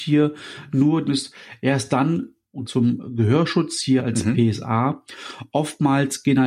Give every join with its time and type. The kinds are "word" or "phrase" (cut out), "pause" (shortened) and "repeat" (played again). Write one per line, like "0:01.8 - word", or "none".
0:01.1 - word
0:02.7 - phrase
0:04.0 - word